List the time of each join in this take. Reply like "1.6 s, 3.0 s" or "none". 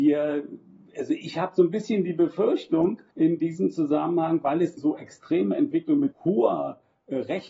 3.1 s, 4.8 s, 6.1 s